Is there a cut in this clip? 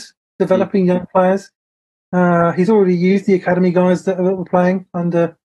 no; 0 cuts

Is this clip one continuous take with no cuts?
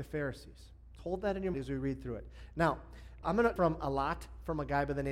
no; 4 cuts; at 1.0 s, 1.5 s, 3.2 s, 3.6 s

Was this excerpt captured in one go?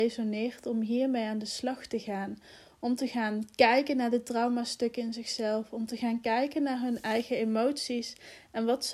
yes; 0 cuts

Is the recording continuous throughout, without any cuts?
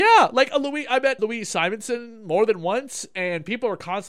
no; 1 cut; at 1.2 s

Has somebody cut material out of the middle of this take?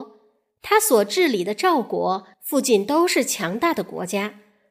yes; 1 cut; at 2.3 s

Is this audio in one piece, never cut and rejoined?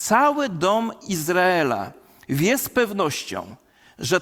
yes; 0 cuts

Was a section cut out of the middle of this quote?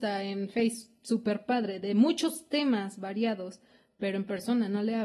no; 0 cuts

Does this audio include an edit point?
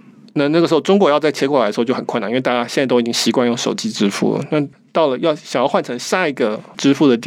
no; 0 cuts

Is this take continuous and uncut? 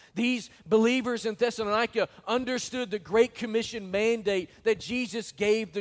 yes; 0 cuts

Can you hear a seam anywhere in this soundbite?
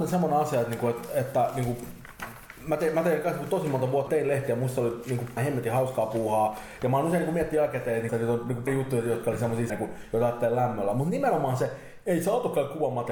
yes; 5 cuts; at 4.1 s, 5.4 s, 8.1 s, 8.7 s, 9.7 s

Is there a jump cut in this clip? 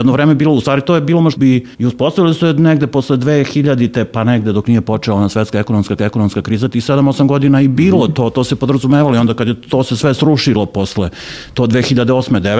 yes; 3 cuts; at 1.4 s, 1.7 s, 6.0 s

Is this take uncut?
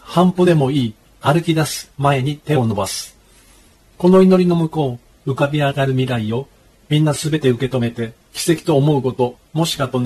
no; 1 cut; at 8.2 s

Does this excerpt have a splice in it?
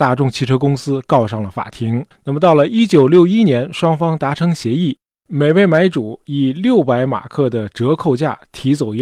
yes; 2 cuts; at 2.1 s, 5.3 s

